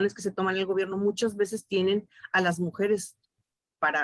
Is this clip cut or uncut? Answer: uncut